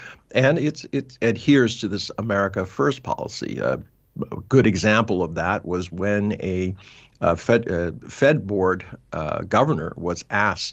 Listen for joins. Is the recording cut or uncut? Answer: uncut